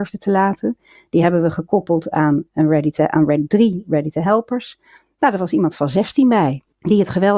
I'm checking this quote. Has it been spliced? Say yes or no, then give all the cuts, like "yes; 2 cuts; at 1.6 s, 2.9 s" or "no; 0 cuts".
no; 0 cuts